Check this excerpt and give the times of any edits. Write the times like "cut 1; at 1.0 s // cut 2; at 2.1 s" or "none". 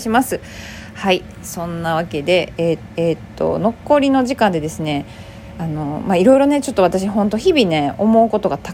cut 1; at 2.9 s